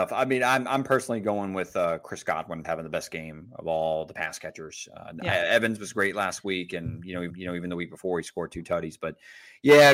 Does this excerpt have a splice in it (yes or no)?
yes